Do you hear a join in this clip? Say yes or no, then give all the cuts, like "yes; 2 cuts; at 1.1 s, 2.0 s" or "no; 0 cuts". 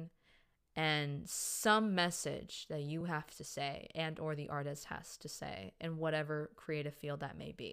no; 0 cuts